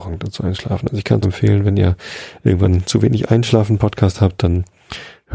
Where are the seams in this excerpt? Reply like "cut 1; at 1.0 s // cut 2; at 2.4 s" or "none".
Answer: cut 1; at 1.2 s